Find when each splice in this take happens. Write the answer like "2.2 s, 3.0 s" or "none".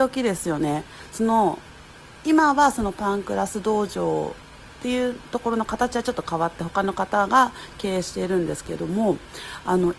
none